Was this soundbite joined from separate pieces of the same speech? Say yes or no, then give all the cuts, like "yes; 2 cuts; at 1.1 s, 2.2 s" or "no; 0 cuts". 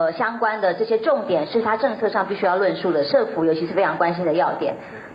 no; 0 cuts